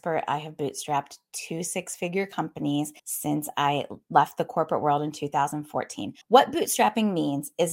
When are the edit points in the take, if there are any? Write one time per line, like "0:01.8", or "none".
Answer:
0:03.0
0:06.2